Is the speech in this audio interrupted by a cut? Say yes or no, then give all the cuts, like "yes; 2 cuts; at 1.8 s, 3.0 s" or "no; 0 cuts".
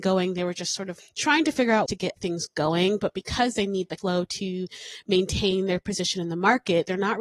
yes; 4 cuts; at 1.0 s, 1.9 s, 2.2 s, 4.0 s